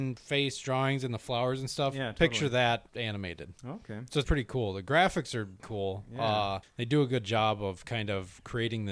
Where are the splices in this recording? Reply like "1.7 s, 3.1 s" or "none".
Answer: 2.9 s, 4.2 s, 5.6 s, 6.6 s